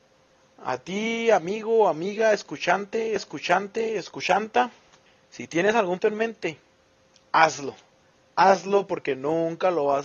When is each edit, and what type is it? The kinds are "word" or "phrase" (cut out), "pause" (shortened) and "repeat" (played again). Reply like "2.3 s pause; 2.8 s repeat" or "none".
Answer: 3.2 s repeat; 6.0 s word